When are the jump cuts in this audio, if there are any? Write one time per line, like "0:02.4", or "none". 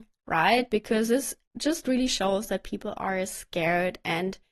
none